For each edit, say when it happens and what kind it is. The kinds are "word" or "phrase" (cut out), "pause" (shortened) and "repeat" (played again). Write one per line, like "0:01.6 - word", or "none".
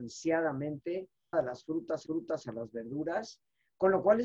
0:01.3 - phrase
0:02.1 - repeat